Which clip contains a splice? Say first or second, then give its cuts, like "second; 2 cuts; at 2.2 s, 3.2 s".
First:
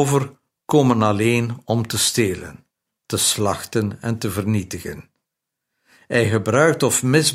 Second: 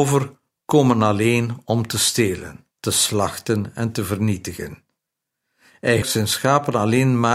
second; 2 cuts; at 2.7 s, 6.0 s